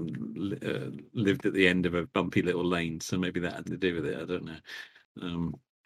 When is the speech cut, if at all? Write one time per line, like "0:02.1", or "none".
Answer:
0:02.0
0:03.6